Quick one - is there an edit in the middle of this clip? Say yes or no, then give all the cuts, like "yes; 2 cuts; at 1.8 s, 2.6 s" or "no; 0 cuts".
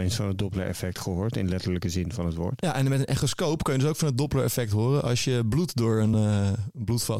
no; 0 cuts